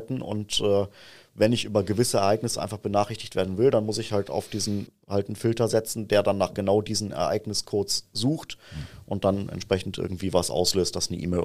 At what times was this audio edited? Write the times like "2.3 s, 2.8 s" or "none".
4.9 s